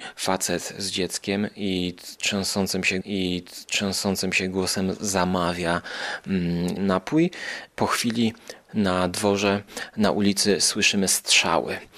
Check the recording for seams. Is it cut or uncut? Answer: cut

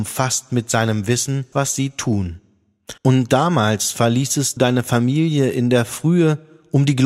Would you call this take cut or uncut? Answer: cut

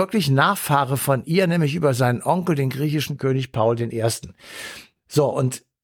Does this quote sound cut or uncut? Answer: uncut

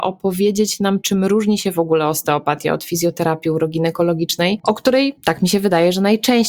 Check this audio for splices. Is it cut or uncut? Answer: uncut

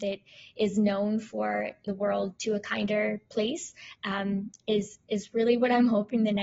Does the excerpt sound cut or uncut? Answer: cut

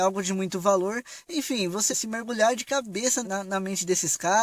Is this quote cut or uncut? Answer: cut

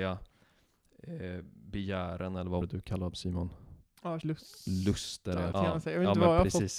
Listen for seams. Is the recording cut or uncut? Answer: cut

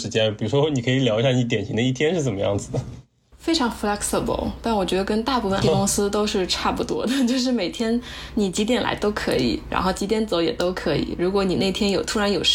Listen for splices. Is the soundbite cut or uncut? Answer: cut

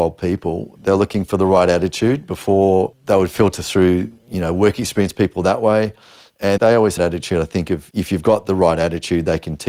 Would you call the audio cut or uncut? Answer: cut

